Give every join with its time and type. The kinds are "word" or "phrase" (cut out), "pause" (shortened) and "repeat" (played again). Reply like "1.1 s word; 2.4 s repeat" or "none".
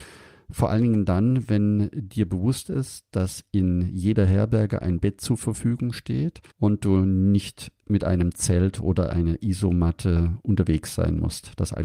6.5 s pause